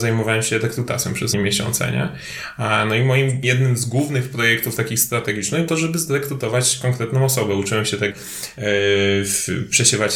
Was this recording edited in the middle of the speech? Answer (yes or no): yes